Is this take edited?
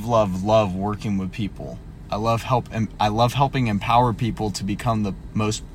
no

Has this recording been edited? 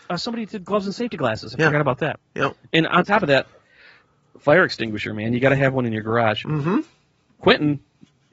no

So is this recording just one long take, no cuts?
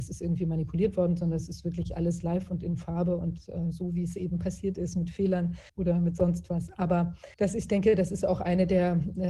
no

